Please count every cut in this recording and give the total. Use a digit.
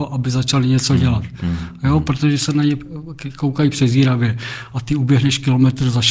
0